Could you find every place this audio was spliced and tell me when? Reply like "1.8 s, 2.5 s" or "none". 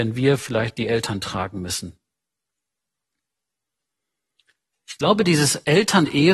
none